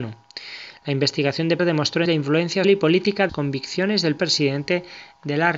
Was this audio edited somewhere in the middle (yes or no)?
yes